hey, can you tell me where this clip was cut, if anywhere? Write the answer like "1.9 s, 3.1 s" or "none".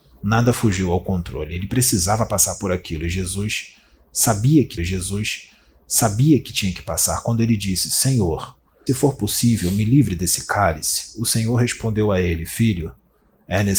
4.8 s, 8.9 s